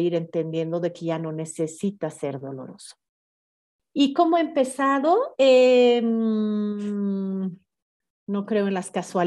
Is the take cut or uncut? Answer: uncut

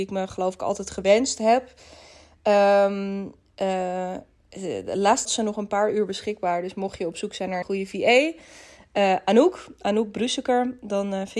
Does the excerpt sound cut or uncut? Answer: cut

